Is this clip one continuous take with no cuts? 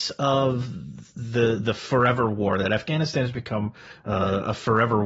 yes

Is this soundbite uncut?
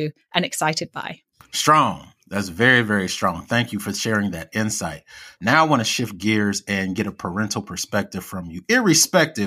yes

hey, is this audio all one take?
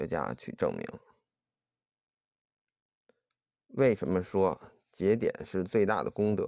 yes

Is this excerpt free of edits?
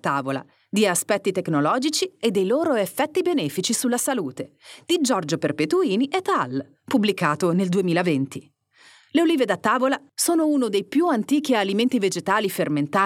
yes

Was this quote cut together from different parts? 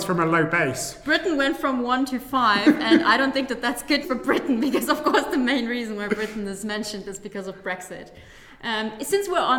yes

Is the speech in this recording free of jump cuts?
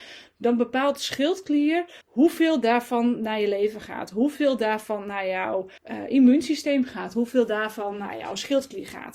no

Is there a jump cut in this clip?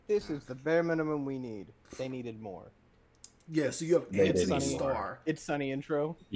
no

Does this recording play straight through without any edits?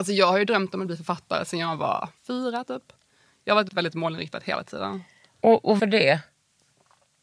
no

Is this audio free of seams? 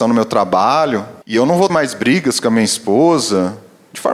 no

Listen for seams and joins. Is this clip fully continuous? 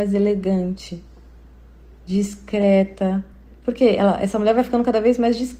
yes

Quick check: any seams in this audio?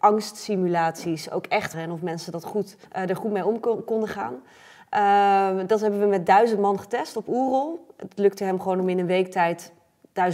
yes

